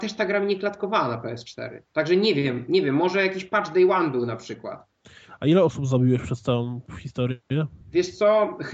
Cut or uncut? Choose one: cut